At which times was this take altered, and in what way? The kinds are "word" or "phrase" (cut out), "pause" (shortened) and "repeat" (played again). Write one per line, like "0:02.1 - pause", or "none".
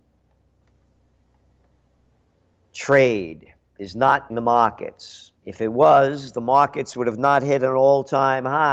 0:04.3 - word
0:05.4 - pause